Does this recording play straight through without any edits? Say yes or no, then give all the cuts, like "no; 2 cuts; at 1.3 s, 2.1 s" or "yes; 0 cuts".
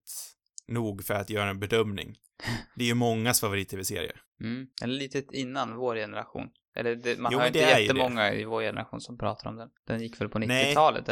no; 2 cuts; at 4.7 s, 9.8 s